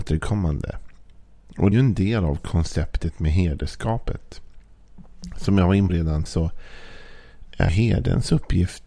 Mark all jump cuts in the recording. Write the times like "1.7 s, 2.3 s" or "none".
1.7 s, 5.9 s, 6.3 s, 7.7 s